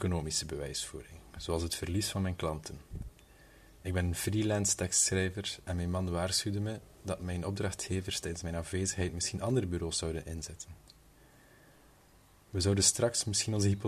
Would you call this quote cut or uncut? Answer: uncut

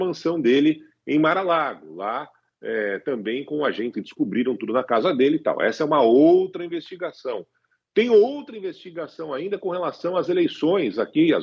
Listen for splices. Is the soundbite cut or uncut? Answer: cut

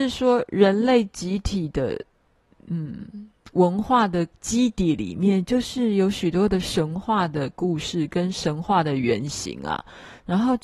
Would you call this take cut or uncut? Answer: uncut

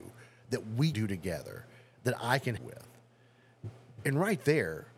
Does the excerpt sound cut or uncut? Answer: cut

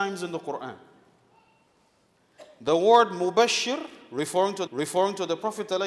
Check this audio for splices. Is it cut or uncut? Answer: cut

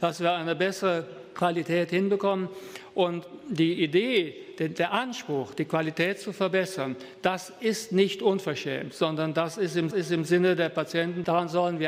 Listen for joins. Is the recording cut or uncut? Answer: cut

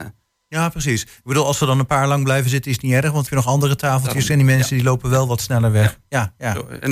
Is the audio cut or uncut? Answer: cut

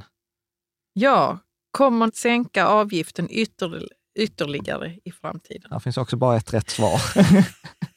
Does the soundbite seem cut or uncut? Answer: cut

